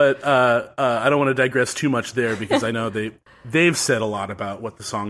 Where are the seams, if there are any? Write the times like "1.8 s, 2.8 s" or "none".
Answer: none